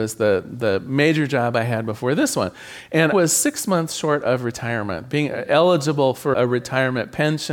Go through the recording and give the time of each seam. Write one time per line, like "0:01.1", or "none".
0:03.1
0:06.3